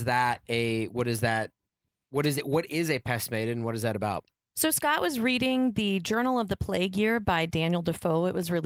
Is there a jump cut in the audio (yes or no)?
no